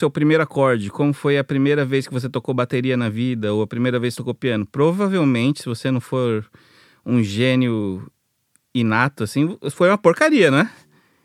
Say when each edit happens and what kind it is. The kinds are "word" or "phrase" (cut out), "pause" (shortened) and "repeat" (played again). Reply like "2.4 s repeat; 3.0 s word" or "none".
none